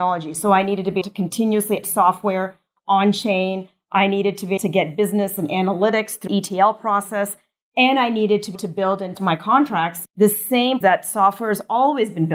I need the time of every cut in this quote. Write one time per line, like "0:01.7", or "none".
0:01.0
0:01.8
0:04.6
0:05.4
0:06.3
0:08.5
0:09.1
0:10.0
0:10.8